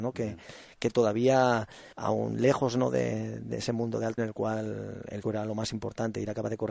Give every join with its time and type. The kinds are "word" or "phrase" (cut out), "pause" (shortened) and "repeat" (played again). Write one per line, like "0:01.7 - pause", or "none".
0:01.9 - pause
0:04.2 - word
0:05.2 - word